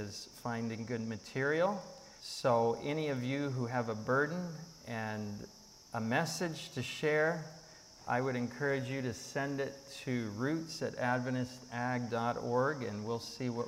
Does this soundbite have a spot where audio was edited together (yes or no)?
yes